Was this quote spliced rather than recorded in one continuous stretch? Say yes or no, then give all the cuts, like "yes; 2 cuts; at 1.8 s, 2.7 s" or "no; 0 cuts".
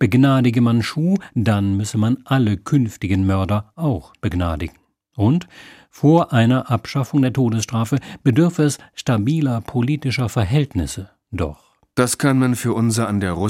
no; 0 cuts